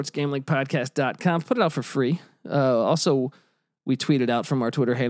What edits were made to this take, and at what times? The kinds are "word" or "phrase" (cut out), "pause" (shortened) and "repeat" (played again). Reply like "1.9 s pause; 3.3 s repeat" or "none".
none